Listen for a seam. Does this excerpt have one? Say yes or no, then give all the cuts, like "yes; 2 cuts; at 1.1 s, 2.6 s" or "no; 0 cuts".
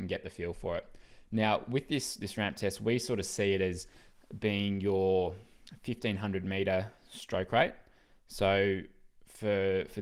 no; 0 cuts